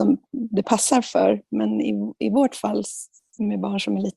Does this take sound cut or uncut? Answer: uncut